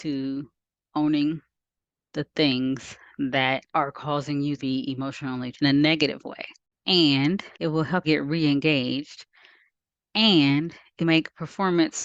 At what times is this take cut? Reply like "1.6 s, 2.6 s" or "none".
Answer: 3.7 s, 4.6 s, 5.5 s, 7.5 s, 8.0 s, 11.0 s